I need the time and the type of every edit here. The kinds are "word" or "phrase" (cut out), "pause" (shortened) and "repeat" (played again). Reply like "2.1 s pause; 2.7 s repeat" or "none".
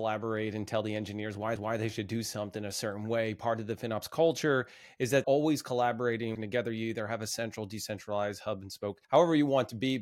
1.6 s repeat; 5.2 s phrase; 6.4 s word; 9.0 s pause